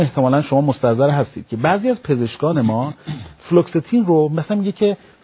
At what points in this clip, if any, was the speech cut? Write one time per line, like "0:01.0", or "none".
none